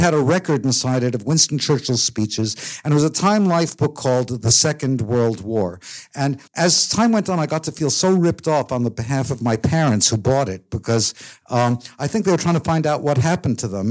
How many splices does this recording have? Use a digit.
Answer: 1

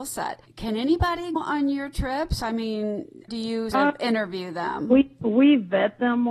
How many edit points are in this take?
3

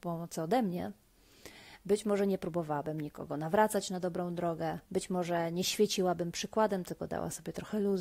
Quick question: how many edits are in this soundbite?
1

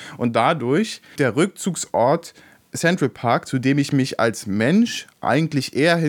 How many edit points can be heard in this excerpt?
1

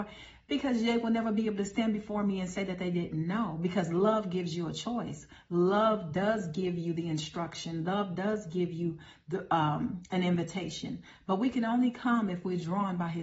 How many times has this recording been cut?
0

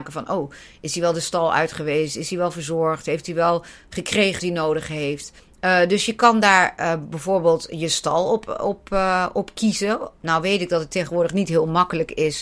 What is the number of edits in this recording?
2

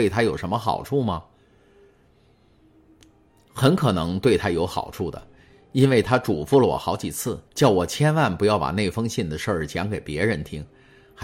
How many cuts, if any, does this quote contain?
1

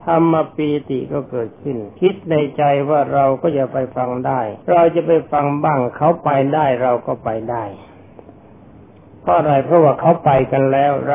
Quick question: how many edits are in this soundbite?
2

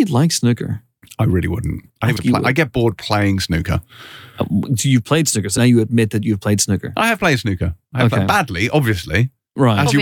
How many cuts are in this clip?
2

